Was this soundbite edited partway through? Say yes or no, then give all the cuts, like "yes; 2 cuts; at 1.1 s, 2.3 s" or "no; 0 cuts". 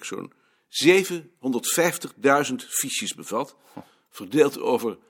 no; 0 cuts